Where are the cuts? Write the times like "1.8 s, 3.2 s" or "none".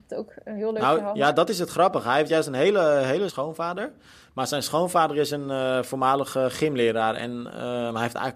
3.3 s

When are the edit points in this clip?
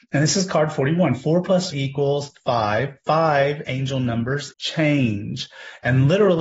1.7 s, 3.6 s, 4.5 s

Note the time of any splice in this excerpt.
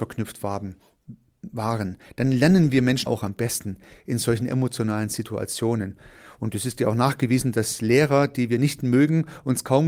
3.1 s

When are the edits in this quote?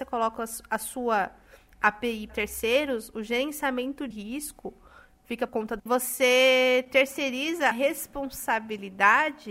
2.3 s, 4.1 s, 5.5 s, 5.8 s, 7.7 s

